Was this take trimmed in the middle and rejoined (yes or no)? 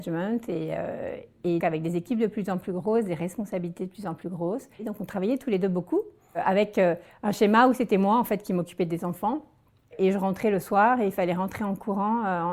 yes